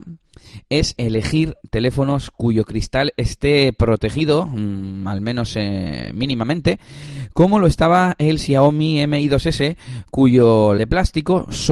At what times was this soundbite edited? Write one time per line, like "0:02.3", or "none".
0:01.0
0:10.8